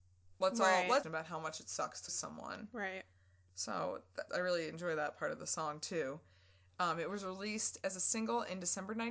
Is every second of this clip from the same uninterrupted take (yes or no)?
no